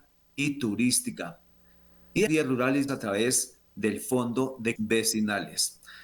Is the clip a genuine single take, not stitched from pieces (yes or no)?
no